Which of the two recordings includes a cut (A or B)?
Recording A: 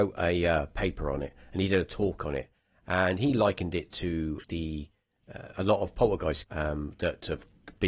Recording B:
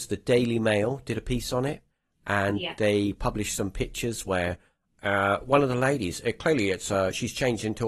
A